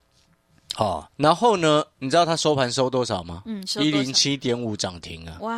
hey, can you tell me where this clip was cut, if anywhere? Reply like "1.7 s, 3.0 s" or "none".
1.1 s